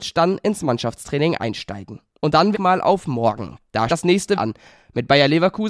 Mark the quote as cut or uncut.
cut